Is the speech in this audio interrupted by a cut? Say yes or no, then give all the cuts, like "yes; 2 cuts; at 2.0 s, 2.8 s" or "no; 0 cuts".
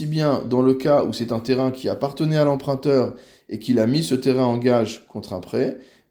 no; 0 cuts